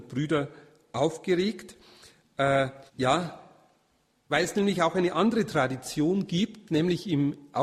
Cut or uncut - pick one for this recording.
cut